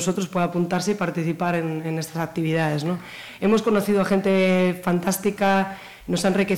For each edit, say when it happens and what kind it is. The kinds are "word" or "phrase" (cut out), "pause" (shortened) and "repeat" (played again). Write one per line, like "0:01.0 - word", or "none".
none